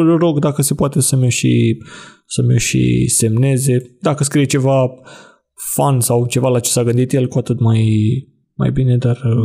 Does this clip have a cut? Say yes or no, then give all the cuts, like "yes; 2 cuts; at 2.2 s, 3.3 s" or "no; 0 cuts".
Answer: no; 0 cuts